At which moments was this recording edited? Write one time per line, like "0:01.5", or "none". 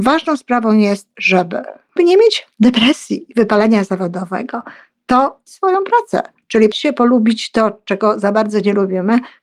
0:02.0
0:05.5
0:06.7